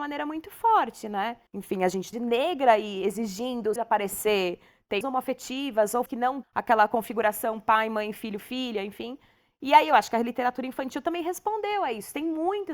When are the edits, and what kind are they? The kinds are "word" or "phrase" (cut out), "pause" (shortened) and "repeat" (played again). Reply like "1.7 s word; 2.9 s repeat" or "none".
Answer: 1.5 s pause; 2.1 s phrase; 3.8 s phrase; 5.0 s phrase; 6.1 s word; 6.4 s word